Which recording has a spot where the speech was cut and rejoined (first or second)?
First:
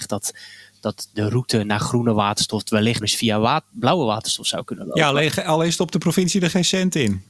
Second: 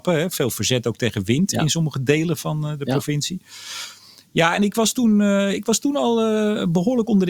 first